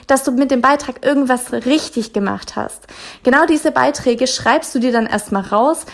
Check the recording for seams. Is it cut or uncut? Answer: uncut